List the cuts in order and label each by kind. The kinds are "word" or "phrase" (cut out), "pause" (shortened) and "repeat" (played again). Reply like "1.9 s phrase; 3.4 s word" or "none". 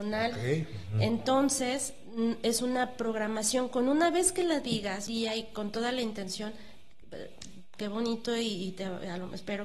5.1 s word